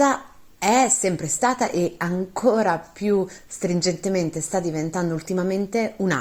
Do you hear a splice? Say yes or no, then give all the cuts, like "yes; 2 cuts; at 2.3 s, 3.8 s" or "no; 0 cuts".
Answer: no; 0 cuts